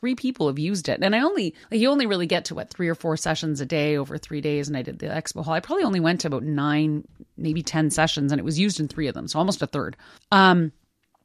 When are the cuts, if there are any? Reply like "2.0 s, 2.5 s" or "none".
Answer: 1.6 s, 10.2 s